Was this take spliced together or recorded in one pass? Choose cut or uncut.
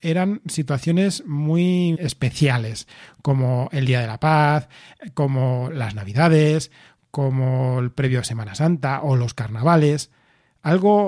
cut